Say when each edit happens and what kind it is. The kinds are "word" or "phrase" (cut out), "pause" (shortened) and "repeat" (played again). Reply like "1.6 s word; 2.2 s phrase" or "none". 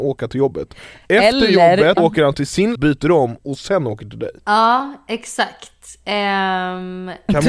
2.0 s word; 2.7 s word; 4.4 s pause